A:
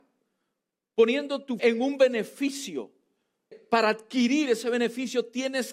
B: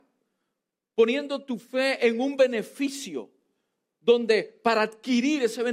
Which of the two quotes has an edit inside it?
A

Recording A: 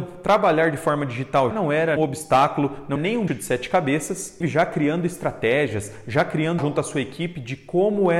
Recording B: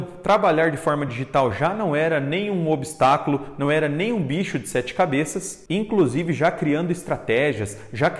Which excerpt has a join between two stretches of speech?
A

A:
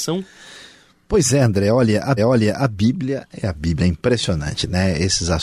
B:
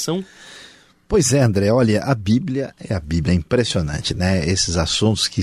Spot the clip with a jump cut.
A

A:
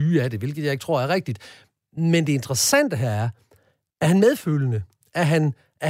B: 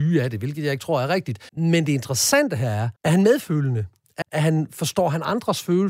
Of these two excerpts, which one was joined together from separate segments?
B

